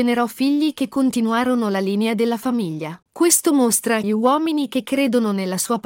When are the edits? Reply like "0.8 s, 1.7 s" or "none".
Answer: 3.0 s, 4.0 s